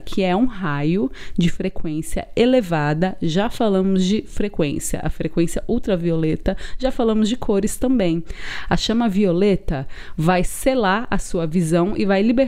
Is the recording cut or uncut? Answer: uncut